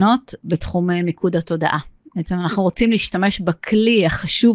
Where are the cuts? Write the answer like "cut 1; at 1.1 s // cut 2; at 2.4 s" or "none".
none